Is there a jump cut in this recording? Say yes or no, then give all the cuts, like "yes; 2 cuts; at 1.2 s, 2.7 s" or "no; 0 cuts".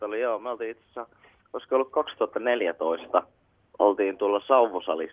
no; 0 cuts